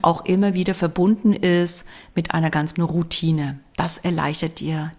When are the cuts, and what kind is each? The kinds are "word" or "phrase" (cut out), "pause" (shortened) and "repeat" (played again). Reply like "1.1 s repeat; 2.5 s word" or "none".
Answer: 2.7 s word